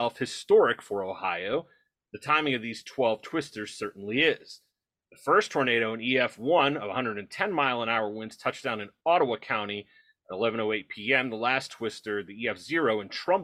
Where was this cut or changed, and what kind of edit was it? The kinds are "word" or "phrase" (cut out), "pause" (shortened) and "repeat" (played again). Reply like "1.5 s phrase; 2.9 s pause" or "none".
none